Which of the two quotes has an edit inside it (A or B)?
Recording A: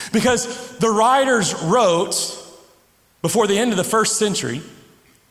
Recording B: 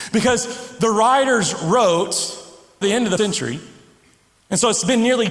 B